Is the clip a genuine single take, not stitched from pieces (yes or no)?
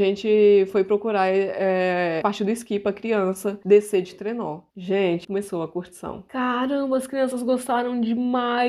no